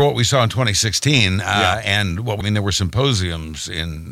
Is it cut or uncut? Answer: cut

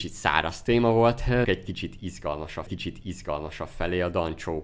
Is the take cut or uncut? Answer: cut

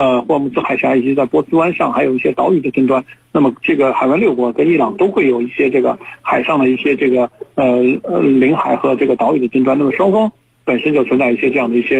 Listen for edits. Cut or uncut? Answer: uncut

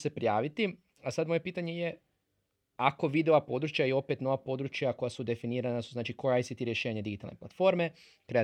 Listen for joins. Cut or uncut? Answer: uncut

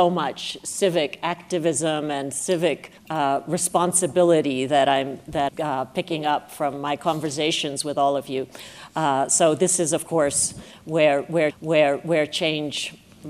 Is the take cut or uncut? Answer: cut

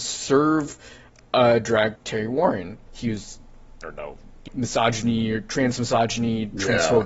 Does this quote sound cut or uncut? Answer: cut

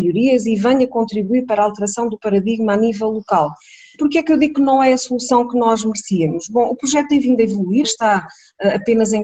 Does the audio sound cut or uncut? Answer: cut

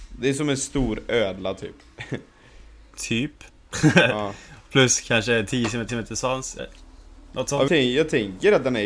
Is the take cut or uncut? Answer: cut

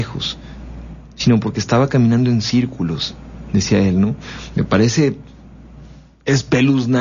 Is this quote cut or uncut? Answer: uncut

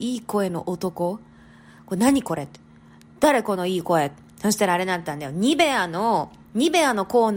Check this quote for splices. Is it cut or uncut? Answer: uncut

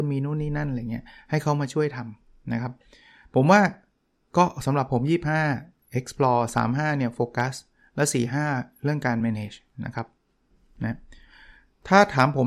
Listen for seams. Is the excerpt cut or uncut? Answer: uncut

